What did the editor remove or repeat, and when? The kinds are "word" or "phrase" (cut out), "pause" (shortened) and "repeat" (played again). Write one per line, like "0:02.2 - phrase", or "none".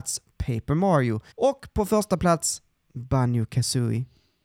0:01.3 - pause